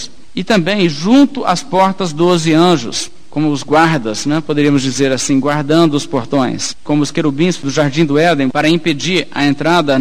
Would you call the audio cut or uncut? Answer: uncut